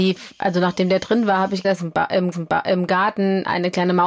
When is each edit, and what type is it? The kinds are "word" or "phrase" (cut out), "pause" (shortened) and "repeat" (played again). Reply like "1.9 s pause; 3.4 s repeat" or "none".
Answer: 1.6 s word; 2.3 s repeat